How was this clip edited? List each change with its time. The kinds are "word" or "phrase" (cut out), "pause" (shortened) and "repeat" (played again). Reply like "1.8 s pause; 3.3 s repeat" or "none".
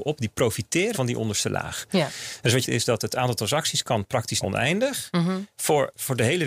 0.9 s phrase; 2.6 s phrase; 4.4 s word

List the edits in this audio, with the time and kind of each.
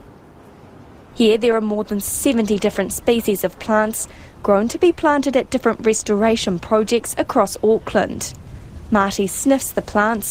none

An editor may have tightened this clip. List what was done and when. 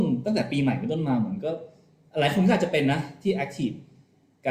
none

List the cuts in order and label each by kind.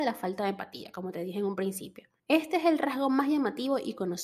2.2 s pause

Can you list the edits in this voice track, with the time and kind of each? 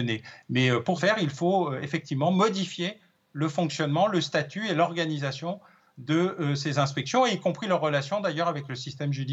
1.0 s word

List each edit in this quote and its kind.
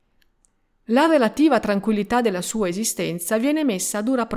none

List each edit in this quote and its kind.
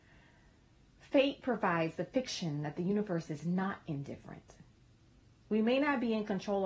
none

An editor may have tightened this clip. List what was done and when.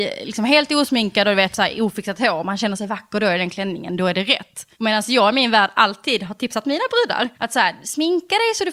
4.7 s pause; 7.3 s pause

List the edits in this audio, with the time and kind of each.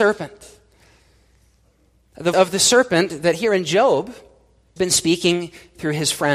2.3 s word; 4.8 s word

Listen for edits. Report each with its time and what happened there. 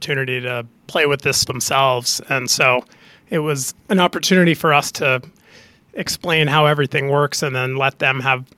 1.5 s word

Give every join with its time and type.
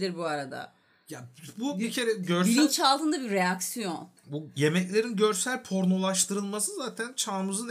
4.2 s pause

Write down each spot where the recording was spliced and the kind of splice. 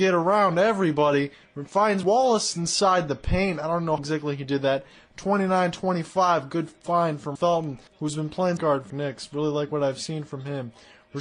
2.0 s word; 4.0 s word; 7.4 s word; 7.9 s pause; 8.6 s phrase; 8.9 s phrase

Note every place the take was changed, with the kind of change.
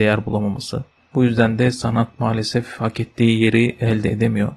none

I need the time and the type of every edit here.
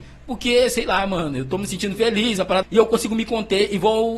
2.6 s word

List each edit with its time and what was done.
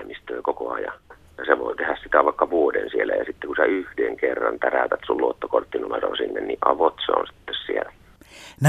none

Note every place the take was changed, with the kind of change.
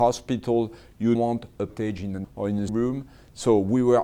1.2 s word; 1.7 s word; 2.2 s word; 2.7 s word

